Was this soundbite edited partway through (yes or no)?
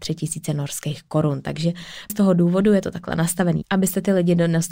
yes